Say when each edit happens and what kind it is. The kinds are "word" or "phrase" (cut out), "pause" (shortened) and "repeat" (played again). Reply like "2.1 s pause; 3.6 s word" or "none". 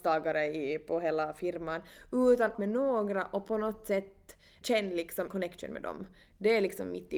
2.5 s phrase; 4.6 s word; 5.3 s word